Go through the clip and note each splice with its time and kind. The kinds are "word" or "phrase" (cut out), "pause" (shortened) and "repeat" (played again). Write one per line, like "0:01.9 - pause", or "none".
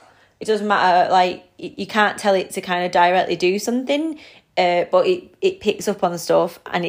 none